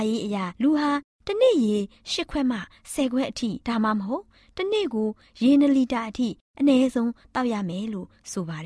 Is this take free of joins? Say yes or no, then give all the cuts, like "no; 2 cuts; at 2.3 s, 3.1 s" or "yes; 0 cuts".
yes; 0 cuts